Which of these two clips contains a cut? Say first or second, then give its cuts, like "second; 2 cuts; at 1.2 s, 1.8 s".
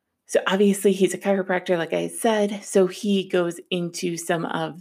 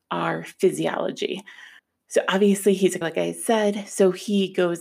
second; 2 cuts; at 1.8 s, 3.0 s